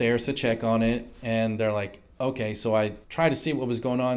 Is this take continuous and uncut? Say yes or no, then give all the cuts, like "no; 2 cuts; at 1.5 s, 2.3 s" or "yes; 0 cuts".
no; 2 cuts; at 2.1 s, 3.0 s